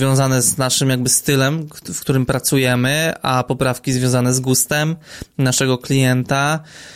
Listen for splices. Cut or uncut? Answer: uncut